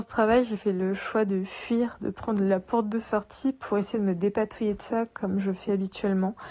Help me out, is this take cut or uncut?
uncut